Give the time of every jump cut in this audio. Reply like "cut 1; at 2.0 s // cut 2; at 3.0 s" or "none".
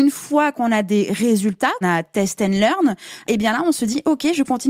cut 1; at 1.8 s // cut 2; at 3.3 s